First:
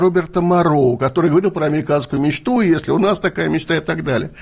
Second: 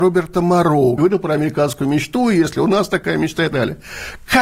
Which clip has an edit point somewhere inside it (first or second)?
second